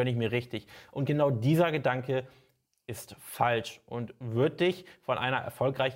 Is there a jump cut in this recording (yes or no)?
no